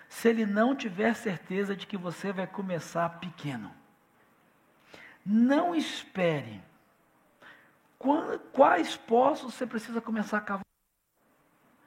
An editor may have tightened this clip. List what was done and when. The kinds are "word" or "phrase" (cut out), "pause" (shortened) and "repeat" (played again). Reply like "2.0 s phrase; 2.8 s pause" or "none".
none